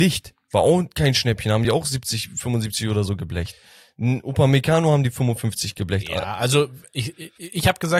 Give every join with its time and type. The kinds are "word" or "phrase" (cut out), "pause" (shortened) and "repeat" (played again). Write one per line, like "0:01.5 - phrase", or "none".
none